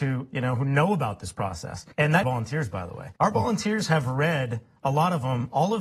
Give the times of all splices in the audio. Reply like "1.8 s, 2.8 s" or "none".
1.9 s, 2.2 s, 3.2 s